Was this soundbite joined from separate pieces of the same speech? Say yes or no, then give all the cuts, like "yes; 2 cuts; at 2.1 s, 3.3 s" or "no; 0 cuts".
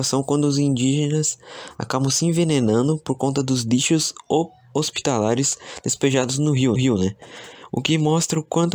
yes; 1 cut; at 6.8 s